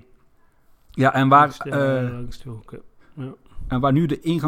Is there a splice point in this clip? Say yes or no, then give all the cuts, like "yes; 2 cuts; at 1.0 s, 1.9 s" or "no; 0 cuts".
no; 0 cuts